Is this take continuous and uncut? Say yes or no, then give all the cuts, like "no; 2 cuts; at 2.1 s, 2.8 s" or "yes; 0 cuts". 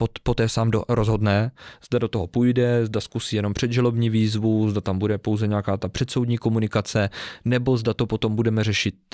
yes; 0 cuts